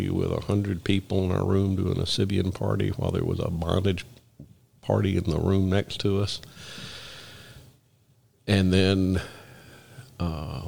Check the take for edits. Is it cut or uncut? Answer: uncut